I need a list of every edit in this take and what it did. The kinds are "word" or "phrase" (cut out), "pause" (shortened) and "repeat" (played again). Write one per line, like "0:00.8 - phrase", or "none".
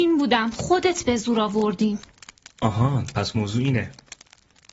none